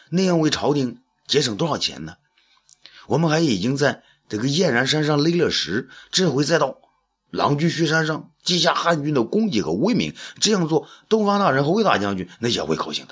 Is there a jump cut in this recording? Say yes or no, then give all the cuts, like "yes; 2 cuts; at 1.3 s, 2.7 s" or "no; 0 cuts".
no; 0 cuts